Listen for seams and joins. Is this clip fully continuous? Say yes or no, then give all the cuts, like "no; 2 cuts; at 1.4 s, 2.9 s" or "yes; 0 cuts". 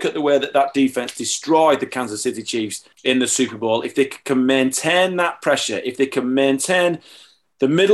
no; 1 cut; at 2.9 s